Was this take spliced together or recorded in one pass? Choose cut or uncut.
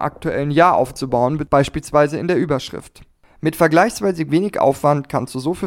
uncut